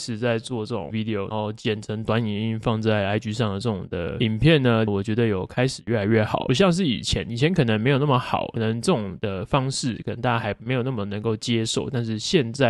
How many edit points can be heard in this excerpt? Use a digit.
2